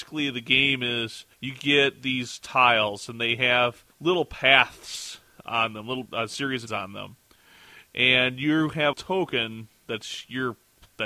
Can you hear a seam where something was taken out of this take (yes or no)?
yes